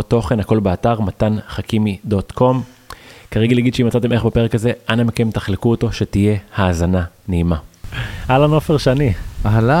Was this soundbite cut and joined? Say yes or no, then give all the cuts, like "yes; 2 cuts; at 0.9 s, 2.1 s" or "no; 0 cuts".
no; 0 cuts